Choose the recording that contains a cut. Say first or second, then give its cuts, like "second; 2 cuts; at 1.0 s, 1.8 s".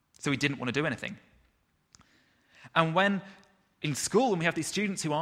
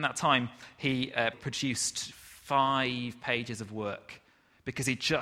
second; 1 cut; at 1.3 s